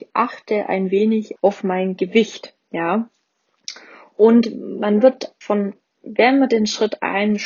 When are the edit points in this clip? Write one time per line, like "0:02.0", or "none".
0:01.4
0:05.4